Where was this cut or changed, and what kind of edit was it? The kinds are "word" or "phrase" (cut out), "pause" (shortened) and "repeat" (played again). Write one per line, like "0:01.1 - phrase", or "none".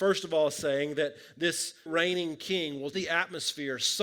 0:01.9 - word
0:02.9 - word